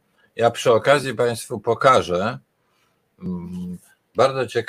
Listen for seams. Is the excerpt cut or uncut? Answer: uncut